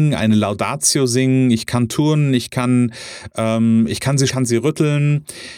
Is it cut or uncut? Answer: cut